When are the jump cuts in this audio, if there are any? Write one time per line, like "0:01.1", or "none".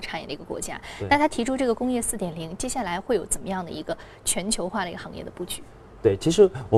none